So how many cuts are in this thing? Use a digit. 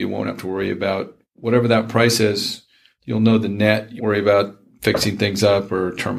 1